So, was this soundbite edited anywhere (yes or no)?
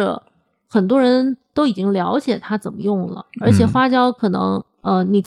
no